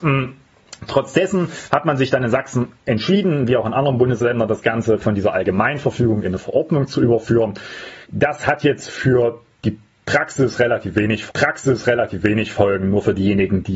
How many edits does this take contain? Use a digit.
2